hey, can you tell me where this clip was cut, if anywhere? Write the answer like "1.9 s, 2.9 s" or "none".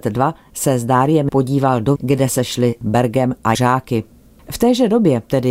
1.3 s, 2.0 s, 2.3 s, 2.8 s, 3.5 s